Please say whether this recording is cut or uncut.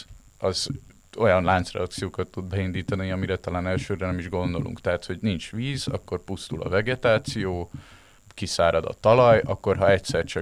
uncut